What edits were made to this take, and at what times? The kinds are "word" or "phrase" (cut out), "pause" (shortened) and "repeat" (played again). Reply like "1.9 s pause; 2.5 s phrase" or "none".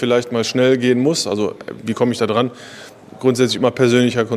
none